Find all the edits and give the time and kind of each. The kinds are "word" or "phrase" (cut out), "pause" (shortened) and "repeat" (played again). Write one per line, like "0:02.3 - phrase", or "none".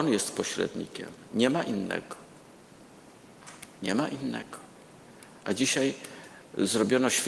none